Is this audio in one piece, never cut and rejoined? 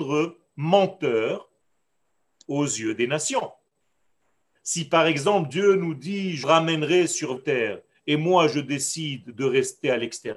no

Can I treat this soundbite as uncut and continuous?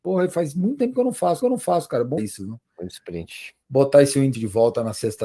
no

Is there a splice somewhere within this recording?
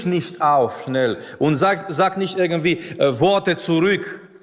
no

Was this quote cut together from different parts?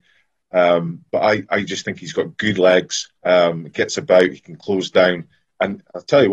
yes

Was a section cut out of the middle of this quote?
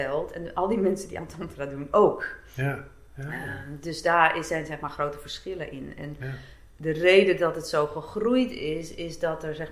no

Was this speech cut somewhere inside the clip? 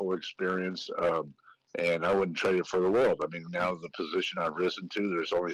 no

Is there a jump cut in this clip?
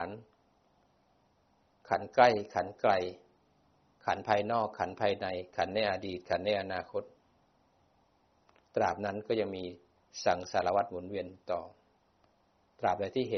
no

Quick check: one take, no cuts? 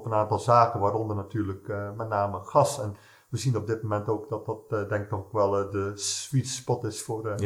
yes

